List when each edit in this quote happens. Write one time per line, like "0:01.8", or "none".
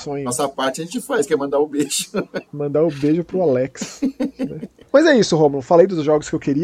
none